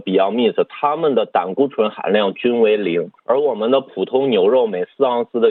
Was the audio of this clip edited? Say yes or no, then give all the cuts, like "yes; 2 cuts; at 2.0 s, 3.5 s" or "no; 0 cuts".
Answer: yes; 1 cut; at 3.2 s